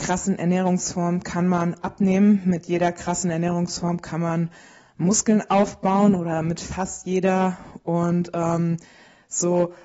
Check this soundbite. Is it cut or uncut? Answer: uncut